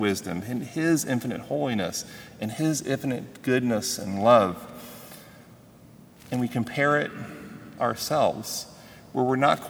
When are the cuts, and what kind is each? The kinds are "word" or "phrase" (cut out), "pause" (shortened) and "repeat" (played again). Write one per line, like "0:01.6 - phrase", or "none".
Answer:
0:07.8 - word